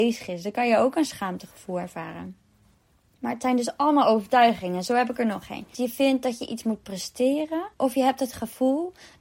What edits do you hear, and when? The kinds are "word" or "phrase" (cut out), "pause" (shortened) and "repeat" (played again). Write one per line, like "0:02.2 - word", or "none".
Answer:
0:07.7 - pause